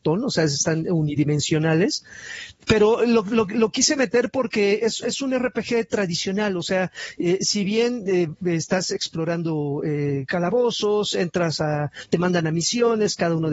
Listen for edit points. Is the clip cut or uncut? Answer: uncut